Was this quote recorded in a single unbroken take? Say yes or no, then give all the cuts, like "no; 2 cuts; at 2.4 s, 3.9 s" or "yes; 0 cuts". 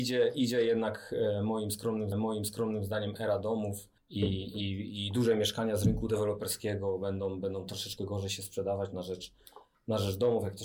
no; 2 cuts; at 2.1 s, 4.0 s